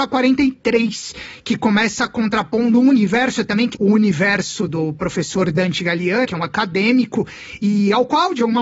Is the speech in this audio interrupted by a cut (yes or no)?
yes